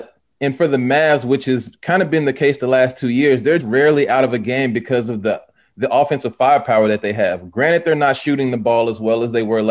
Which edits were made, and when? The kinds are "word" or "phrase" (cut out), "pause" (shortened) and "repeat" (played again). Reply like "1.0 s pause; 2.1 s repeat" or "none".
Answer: 3.6 s word